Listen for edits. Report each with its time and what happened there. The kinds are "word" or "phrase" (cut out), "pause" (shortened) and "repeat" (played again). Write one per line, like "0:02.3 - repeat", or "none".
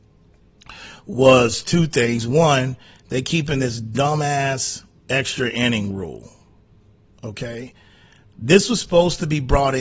none